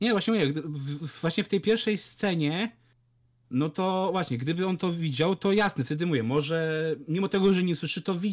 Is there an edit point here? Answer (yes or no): no